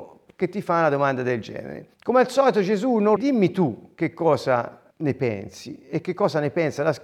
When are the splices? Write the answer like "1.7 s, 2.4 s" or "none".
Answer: 1.9 s, 3.2 s, 4.9 s

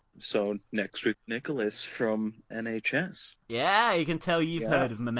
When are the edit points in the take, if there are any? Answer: 1.1 s, 2.5 s

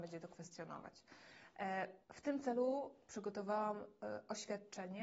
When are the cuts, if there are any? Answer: 2.0 s

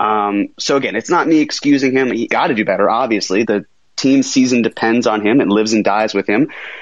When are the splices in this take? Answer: 2.3 s, 3.4 s

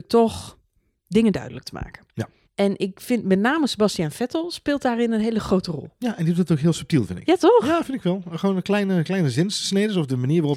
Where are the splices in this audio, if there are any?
2.4 s

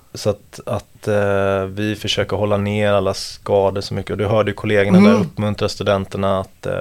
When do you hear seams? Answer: none

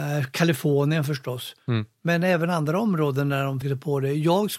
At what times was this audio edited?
3.6 s

